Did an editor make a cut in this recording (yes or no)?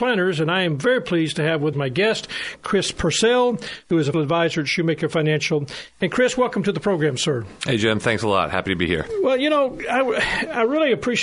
yes